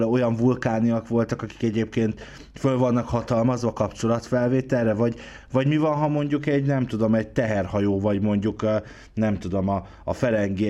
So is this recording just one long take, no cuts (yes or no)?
yes